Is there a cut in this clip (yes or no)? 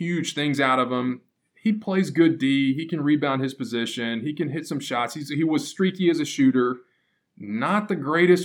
no